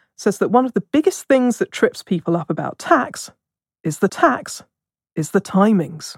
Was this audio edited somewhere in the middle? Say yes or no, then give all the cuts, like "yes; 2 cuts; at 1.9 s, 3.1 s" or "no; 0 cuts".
yes; 1 cut; at 4.1 s